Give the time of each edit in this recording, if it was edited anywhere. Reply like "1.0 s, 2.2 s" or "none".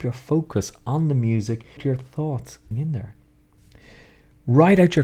1.8 s, 2.7 s